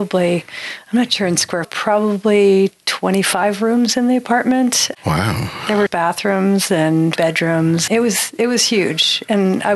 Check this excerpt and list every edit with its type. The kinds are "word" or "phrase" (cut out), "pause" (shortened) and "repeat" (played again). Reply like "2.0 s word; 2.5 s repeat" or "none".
1.6 s phrase; 5.9 s word; 7.2 s word; 7.9 s word